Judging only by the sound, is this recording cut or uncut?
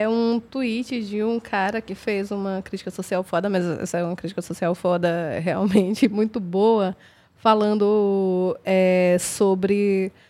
uncut